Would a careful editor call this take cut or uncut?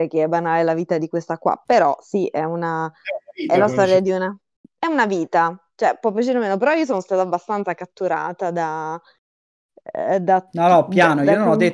uncut